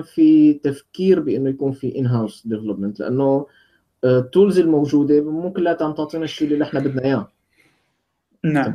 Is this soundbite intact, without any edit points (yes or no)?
yes